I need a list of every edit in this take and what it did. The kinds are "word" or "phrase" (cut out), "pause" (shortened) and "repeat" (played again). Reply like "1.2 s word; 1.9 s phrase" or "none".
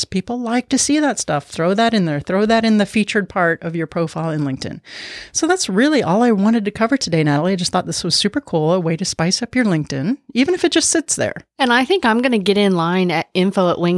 none